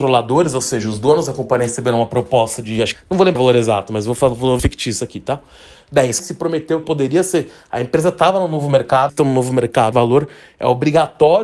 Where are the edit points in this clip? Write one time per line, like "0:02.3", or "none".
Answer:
0:02.9
0:03.4
0:04.6
0:06.2
0:06.8
0:09.1
0:09.9